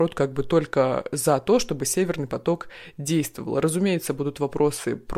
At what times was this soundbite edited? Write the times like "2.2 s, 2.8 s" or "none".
none